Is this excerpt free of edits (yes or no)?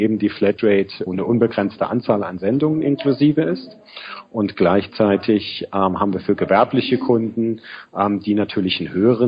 no